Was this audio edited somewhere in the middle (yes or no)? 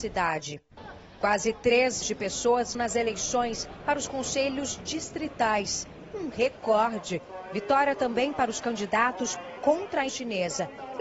yes